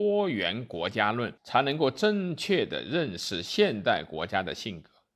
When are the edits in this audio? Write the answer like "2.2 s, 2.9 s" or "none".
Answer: 1.4 s